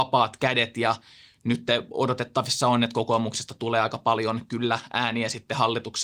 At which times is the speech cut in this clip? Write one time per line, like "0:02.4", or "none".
none